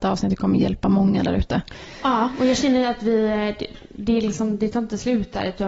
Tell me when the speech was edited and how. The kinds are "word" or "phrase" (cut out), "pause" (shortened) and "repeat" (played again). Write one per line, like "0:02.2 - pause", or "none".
none

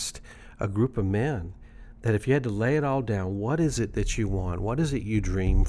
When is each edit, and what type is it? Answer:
none

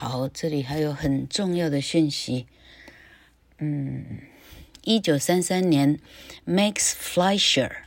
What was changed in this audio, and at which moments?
none

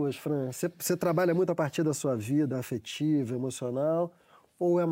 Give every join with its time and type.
none

